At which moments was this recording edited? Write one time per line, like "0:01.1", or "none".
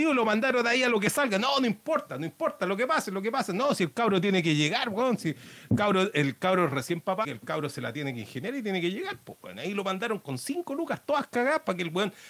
0:07.2